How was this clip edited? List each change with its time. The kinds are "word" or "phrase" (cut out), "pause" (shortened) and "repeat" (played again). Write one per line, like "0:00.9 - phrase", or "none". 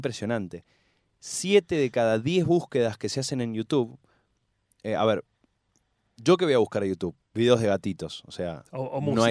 none